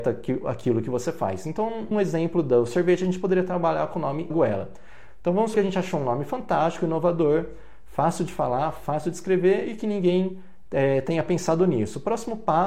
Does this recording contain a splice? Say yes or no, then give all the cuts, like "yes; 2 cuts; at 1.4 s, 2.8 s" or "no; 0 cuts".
yes; 3 cuts; at 1.9 s, 4.3 s, 5.5 s